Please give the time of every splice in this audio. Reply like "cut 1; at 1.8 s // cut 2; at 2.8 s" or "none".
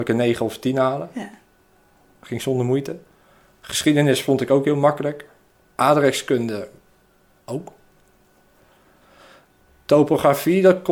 none